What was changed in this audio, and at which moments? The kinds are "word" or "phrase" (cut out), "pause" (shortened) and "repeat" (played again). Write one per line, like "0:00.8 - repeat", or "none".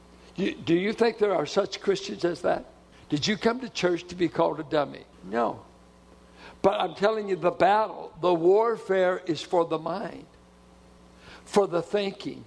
0:02.9 - pause
0:05.1 - pause